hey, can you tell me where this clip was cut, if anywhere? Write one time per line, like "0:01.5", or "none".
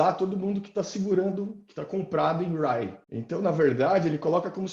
0:03.0

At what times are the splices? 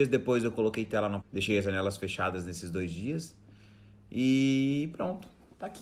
0:01.2

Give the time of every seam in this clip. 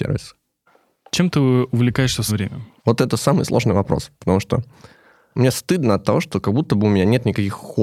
0:02.3

